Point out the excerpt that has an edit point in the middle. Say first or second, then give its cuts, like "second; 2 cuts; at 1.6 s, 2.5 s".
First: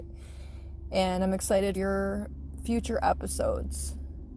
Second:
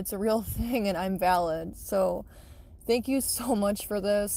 first; 1 cut; at 1.7 s